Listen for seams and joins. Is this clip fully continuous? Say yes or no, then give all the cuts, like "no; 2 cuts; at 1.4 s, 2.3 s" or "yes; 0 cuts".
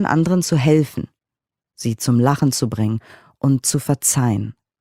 yes; 0 cuts